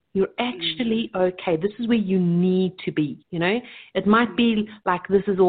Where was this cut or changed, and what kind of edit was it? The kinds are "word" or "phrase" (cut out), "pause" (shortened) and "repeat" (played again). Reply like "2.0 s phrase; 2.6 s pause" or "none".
3.2 s pause